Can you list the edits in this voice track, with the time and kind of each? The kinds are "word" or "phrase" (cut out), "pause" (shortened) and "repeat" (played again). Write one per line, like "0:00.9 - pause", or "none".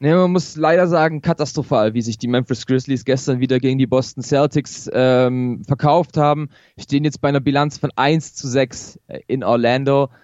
none